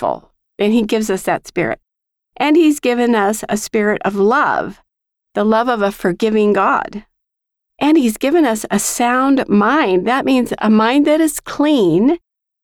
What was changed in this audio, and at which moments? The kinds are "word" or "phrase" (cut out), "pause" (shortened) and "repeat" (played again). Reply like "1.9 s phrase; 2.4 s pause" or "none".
none